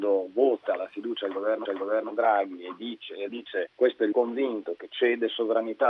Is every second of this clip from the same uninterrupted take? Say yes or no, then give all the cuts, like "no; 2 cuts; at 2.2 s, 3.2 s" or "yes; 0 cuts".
no; 4 cuts; at 1.7 s, 3.3 s, 3.7 s, 4.1 s